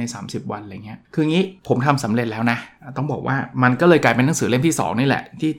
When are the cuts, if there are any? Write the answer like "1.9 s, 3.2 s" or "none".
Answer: 1.0 s, 1.6 s